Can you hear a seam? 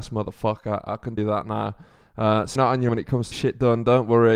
yes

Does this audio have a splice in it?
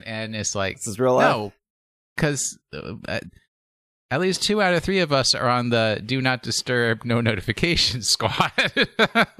no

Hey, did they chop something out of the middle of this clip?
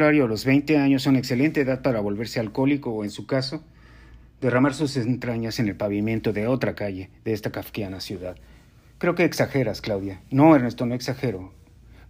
no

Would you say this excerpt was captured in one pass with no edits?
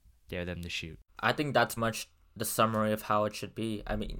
no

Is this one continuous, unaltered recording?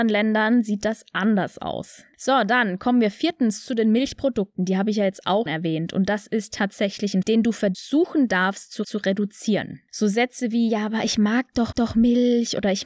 no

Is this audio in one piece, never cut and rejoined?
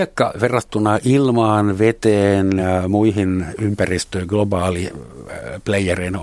yes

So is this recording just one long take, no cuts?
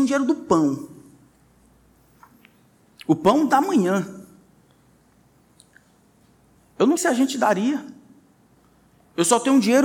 no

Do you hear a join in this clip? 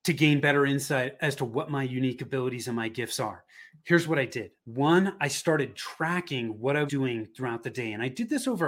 yes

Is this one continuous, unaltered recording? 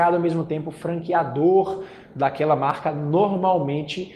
yes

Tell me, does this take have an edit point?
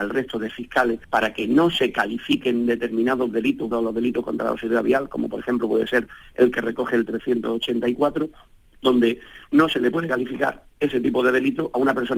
yes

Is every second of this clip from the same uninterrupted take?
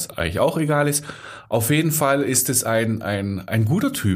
yes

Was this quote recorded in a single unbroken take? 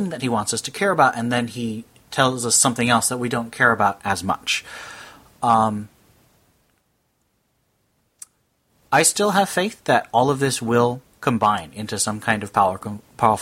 yes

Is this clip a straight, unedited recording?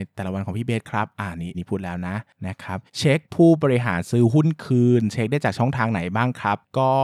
no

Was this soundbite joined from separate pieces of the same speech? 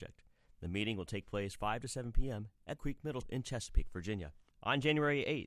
yes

